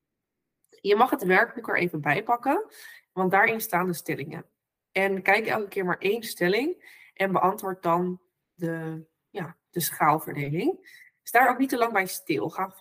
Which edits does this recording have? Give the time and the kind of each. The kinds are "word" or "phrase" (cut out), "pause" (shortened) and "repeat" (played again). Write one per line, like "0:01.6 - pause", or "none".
none